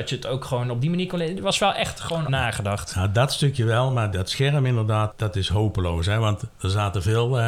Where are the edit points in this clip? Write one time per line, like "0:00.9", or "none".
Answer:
0:02.3
0:04.1
0:05.1